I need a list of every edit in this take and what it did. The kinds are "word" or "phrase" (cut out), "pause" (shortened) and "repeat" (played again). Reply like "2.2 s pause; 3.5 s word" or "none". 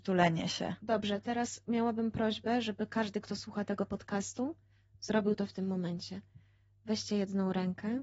none